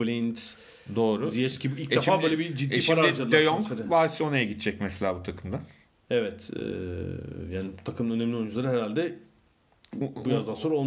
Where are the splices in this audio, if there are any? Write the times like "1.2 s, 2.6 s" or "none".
5.9 s